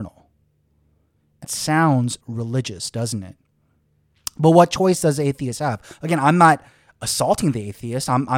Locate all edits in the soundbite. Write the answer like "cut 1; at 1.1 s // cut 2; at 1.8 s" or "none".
cut 1; at 1.4 s // cut 2; at 2.2 s